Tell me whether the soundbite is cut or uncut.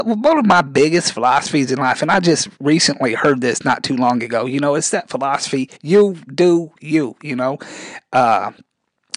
cut